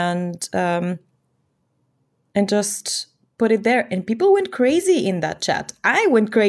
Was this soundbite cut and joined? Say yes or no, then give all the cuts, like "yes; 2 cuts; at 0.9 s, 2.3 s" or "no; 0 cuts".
no; 0 cuts